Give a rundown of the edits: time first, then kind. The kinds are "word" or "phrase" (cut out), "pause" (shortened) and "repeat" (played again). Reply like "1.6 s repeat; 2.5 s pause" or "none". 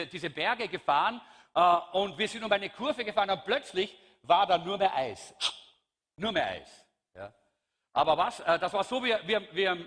none

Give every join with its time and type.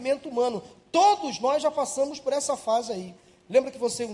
none

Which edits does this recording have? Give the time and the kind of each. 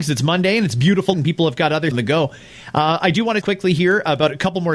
1.1 s word; 1.9 s phrase; 3.4 s word

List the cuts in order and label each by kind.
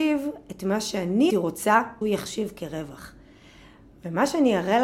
1.3 s word; 2.0 s word

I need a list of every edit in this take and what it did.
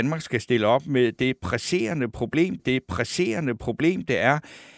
2.6 s repeat

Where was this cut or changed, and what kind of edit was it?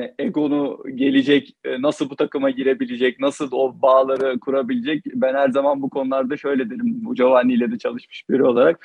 none

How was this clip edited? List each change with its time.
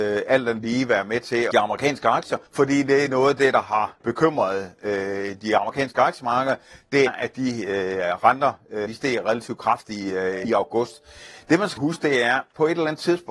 1.5 s phrase; 2.5 s pause; 4.0 s word; 7.1 s word; 8.9 s word; 10.4 s word; 11.8 s word

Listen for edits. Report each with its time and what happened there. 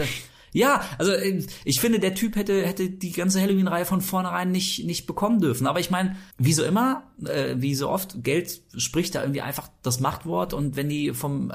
6.3 s pause

